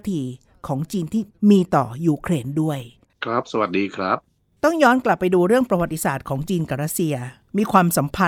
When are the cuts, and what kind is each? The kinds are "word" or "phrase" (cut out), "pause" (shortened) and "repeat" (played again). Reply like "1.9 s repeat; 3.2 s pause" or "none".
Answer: none